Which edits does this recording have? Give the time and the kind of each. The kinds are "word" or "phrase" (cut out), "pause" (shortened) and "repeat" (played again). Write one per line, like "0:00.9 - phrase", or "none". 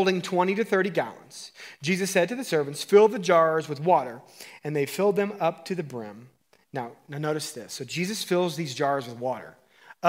0:06.4 - pause